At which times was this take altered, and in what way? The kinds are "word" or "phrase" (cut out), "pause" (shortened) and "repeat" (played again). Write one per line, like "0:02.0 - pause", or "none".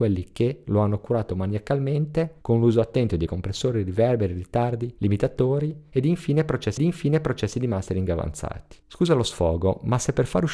0:03.3 - word
0:06.8 - repeat
0:08.8 - pause